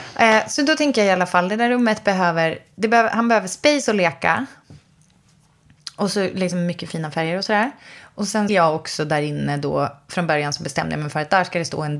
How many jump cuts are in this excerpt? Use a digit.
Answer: 1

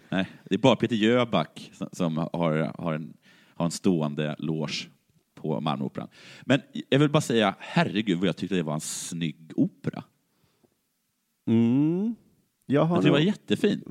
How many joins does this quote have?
0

